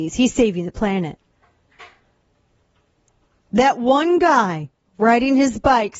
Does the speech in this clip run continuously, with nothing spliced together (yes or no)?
yes